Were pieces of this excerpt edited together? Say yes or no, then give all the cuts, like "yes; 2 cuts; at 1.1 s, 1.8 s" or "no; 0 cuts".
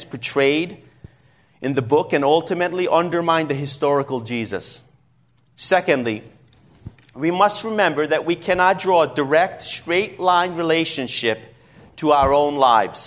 no; 0 cuts